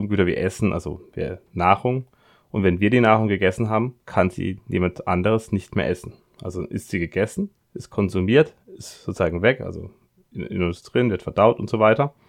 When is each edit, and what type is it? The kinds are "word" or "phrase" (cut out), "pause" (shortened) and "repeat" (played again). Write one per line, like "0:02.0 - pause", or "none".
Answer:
0:07.6 - pause